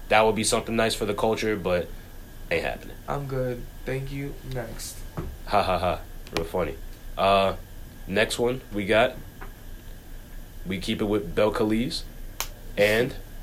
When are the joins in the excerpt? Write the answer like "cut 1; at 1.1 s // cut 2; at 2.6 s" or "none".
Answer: cut 1; at 2.5 s